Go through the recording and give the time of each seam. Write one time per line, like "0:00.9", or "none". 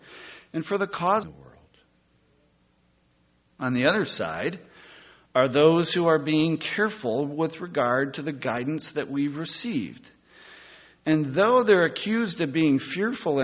0:01.2